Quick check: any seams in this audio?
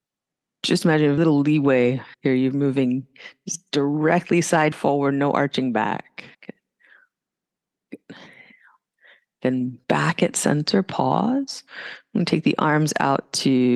yes; 5 cuts; at 1.2 s, 2.1 s, 4.7 s, 6.3 s, 9.8 s

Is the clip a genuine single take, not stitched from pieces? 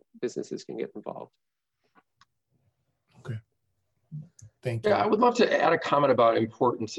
yes; 0 cuts

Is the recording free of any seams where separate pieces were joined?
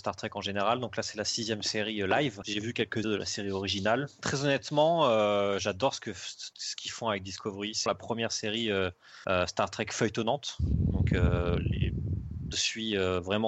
no; 3 cuts; at 3.0 s, 7.9 s, 12.5 s

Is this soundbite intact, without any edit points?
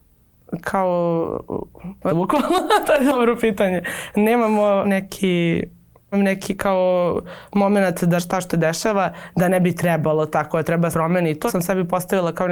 no; 8 cuts; at 2.1 s, 2.8 s, 4.8 s, 6.1 s, 8.2 s, 8.5 s, 10.9 s, 11.5 s

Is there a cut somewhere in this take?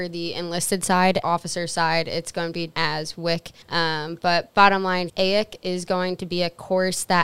yes; 4 cuts; at 1.2 s, 2.7 s, 3.6 s, 5.1 s

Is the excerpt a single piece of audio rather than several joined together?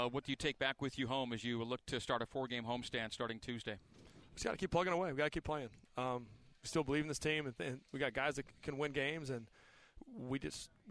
yes; 0 cuts

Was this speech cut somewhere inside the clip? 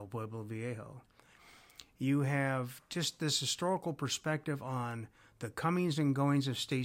no; 0 cuts

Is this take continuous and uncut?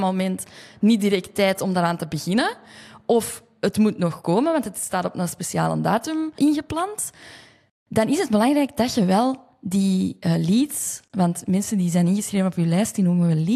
yes; 0 cuts

